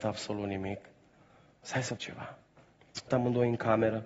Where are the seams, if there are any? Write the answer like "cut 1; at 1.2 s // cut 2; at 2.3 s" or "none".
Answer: cut 1; at 2.0 s // cut 2; at 3.1 s